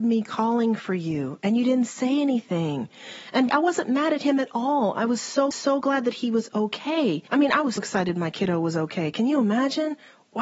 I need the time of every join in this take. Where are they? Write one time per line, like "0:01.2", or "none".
0:03.5
0:05.5
0:07.3
0:07.8